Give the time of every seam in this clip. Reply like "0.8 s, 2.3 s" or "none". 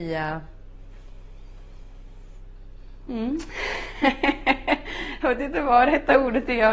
none